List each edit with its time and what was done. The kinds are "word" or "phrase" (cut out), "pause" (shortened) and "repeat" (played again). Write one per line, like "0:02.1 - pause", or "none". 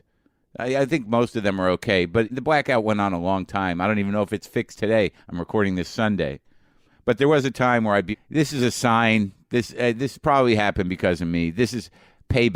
0:02.3 - word
0:08.1 - word